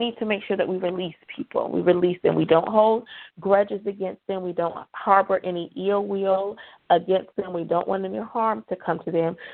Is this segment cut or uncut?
uncut